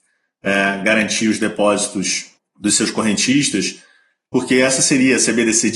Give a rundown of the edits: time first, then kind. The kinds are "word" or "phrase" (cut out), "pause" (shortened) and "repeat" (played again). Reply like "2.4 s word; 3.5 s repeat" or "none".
none